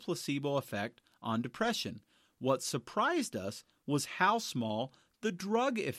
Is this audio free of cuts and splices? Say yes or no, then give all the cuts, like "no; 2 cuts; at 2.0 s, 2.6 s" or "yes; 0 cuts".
yes; 0 cuts